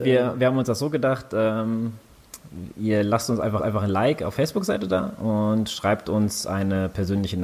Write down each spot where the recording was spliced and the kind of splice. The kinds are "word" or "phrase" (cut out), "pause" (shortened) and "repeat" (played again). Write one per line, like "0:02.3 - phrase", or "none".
0:03.6 - repeat
0:04.3 - word